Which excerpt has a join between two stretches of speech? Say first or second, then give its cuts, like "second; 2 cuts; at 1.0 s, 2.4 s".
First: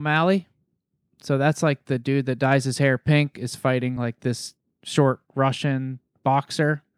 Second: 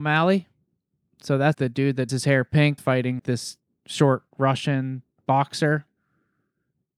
second; 4 cuts; at 1.5 s, 2.1 s, 2.8 s, 3.2 s